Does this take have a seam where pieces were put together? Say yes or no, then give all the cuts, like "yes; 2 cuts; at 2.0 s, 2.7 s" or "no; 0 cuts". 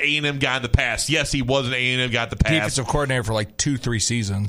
no; 0 cuts